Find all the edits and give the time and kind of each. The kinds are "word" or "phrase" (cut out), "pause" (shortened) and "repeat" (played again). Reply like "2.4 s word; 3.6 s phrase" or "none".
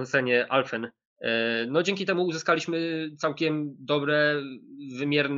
none